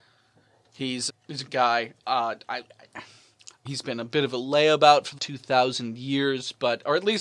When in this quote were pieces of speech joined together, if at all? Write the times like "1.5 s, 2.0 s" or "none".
1.1 s, 1.5 s, 3.7 s, 5.2 s

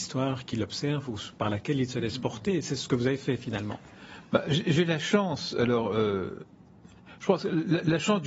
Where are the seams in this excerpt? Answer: none

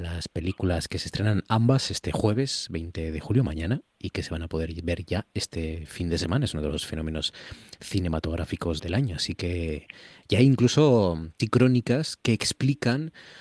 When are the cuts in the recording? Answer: 4.0 s, 8.8 s, 11.4 s

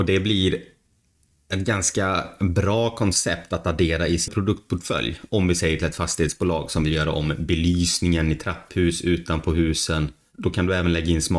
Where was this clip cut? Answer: 4.3 s

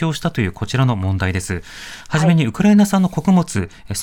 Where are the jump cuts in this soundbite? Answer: none

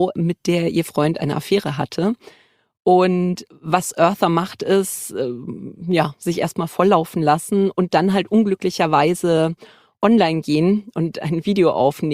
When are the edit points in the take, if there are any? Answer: none

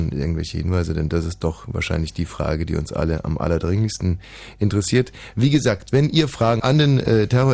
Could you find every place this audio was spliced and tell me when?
6.6 s

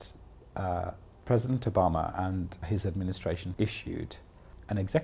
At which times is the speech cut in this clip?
2.6 s, 3.5 s

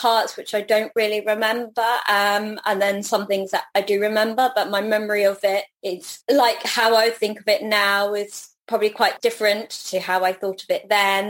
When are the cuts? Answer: none

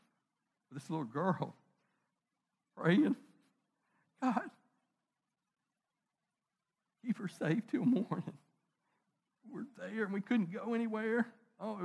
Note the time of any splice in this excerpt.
none

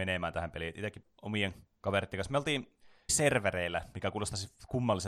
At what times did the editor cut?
1.0 s, 3.1 s

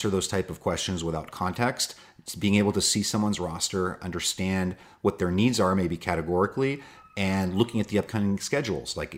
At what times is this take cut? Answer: none

